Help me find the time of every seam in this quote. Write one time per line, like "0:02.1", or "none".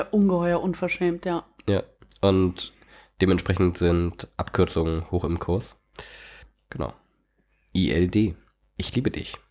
none